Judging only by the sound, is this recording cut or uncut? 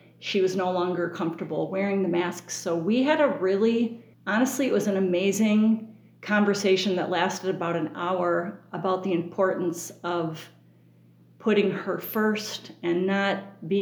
cut